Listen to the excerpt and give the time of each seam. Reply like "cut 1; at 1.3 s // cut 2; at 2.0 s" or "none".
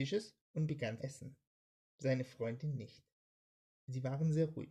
cut 1; at 1.0 s